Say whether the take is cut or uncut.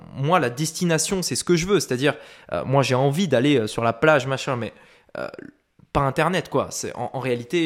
uncut